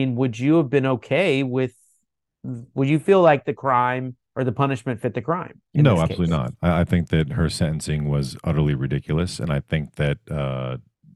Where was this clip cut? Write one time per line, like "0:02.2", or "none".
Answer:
0:04.2